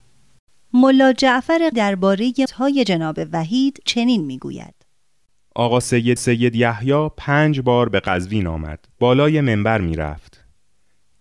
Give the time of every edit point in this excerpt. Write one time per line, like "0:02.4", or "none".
0:01.7
0:02.5
0:03.9
0:06.2
0:08.9